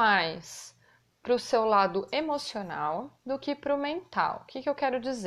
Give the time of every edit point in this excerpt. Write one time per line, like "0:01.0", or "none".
0:03.1